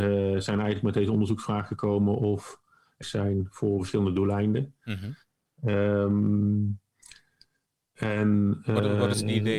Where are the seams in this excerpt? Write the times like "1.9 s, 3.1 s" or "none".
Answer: 3.0 s

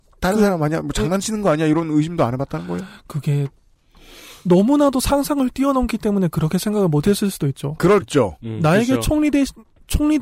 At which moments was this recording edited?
8.0 s

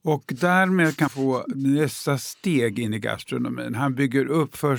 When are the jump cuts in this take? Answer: 1.1 s

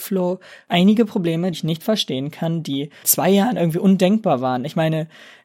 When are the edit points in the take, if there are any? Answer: 1.5 s, 3.0 s

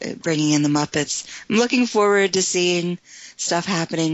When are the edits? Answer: none

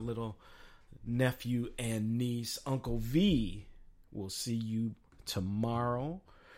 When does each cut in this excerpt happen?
none

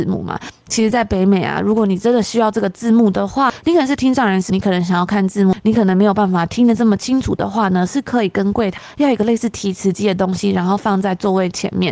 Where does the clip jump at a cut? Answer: 4.5 s

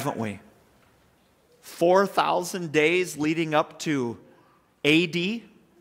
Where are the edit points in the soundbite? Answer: none

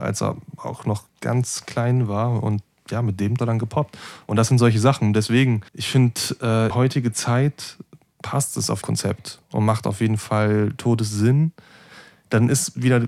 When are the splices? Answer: 1.1 s, 3.4 s, 5.7 s, 6.7 s, 8.8 s

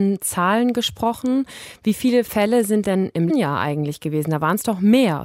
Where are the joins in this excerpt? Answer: 2.8 s, 3.3 s

